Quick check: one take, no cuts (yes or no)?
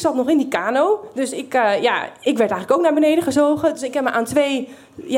yes